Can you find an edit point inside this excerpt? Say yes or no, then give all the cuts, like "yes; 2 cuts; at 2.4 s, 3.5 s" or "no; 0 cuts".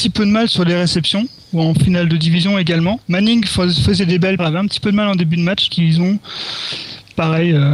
yes; 3 cuts; at 3.0 s, 4.4 s, 5.7 s